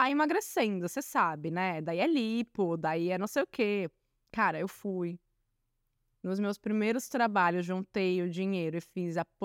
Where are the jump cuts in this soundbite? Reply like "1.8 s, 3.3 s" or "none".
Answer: none